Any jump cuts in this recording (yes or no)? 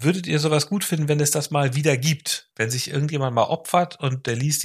yes